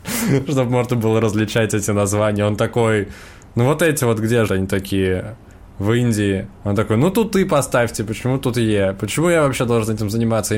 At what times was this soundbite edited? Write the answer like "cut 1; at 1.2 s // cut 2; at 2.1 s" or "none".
cut 1; at 4.5 s // cut 2; at 6.6 s

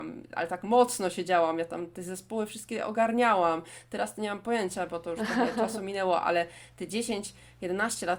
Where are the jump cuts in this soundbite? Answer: none

